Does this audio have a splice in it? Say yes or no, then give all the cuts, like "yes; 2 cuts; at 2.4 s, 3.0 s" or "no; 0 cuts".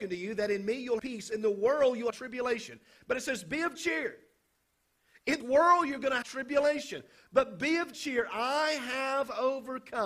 yes; 6 cuts; at 1.0 s, 2.1 s, 3.8 s, 5.4 s, 6.2 s, 7.9 s